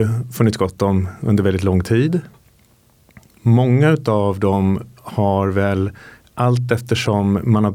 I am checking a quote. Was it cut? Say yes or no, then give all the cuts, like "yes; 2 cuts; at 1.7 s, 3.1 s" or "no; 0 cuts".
no; 0 cuts